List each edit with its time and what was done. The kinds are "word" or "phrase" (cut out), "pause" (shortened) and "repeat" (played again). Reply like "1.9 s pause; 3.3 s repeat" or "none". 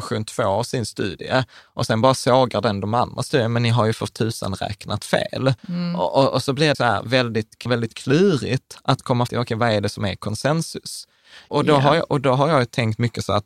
5.6 s pause; 6.7 s phrase; 7.7 s phrase; 9.3 s word